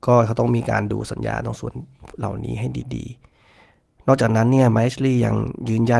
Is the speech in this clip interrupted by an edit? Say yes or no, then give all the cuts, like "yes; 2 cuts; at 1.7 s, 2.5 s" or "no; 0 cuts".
no; 0 cuts